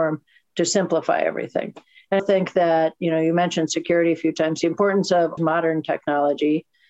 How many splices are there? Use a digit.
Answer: 2